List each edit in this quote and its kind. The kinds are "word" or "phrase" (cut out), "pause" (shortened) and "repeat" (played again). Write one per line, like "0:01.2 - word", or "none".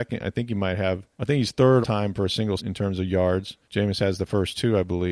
0:01.1 - pause
0:01.8 - word
0:02.6 - word
0:03.6 - pause